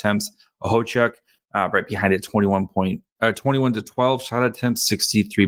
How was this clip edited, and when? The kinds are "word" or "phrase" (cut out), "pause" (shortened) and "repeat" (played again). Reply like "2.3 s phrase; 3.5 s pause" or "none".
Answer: none